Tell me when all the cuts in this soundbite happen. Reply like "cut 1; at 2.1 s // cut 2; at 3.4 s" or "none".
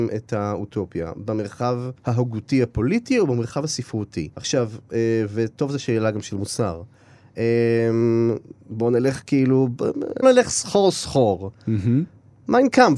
cut 1; at 2.0 s // cut 2; at 4.3 s // cut 3; at 8.6 s // cut 4; at 10.2 s